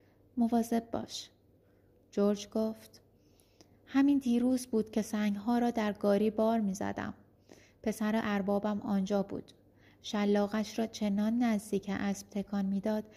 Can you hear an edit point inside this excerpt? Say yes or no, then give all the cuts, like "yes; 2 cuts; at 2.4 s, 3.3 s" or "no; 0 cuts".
no; 0 cuts